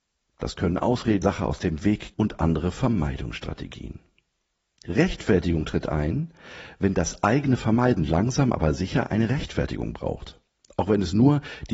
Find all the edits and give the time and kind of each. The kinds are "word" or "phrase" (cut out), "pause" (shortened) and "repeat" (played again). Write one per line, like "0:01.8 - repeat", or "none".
0:01.2 - phrase
0:02.1 - word

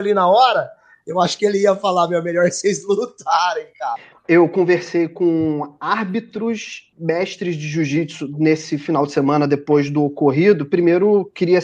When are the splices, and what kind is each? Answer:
0:06.9 - word

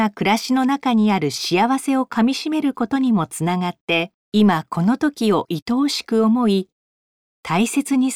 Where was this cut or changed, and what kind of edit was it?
0:04.2 - pause

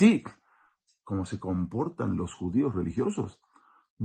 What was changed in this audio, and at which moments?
none

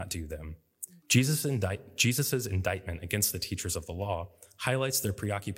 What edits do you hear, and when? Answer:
0:01.0 - pause

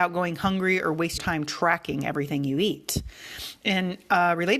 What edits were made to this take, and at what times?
0:01.2 - word

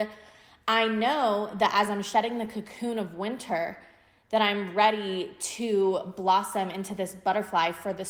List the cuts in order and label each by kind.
none

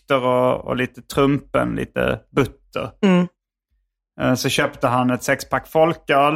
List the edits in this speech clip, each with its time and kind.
none

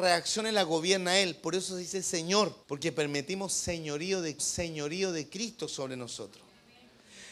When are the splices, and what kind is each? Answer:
0:02.6 - pause
0:04.4 - repeat

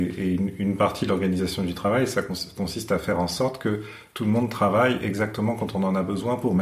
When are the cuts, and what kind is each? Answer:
none

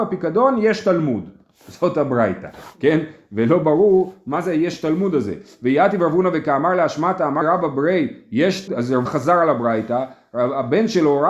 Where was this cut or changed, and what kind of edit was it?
0:07.4 - word
0:08.7 - word
0:09.1 - word

